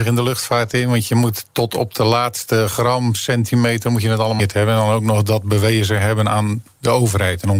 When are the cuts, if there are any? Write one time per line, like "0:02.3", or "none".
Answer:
0:04.4